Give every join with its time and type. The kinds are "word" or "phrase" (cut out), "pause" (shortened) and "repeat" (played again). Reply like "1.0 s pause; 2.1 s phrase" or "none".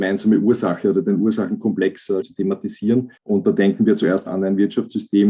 2.2 s word; 3.2 s pause; 4.3 s word